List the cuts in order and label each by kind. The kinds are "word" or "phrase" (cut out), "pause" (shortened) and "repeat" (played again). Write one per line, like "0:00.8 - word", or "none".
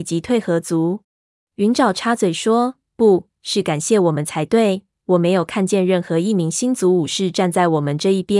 0:01.0 - pause